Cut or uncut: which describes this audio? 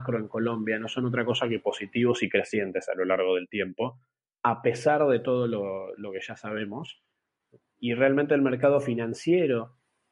uncut